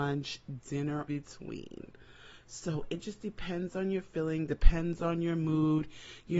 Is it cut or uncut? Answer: cut